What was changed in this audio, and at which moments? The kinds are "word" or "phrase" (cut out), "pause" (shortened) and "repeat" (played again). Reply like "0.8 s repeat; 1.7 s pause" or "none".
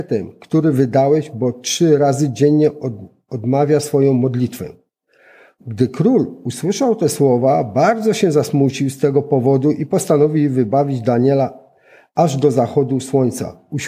none